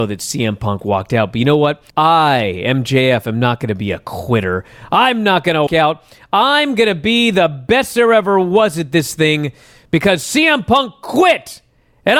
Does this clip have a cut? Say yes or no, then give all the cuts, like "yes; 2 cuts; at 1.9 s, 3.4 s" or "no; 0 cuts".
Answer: yes; 2 cuts; at 1.9 s, 5.7 s